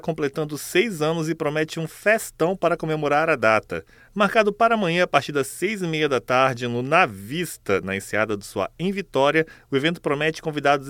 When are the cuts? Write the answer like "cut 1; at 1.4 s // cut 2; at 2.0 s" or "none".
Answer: none